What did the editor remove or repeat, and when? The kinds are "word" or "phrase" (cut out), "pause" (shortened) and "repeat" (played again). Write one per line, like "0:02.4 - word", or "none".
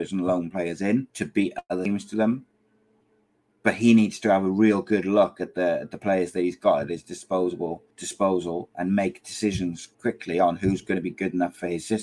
0:01.1 - pause
0:03.0 - pause
0:07.9 - pause
0:09.9 - pause